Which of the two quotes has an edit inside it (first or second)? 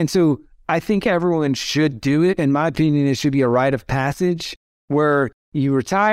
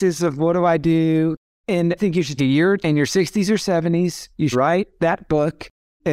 second